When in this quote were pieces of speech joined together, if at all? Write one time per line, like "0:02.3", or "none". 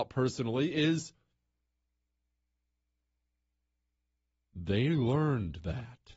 none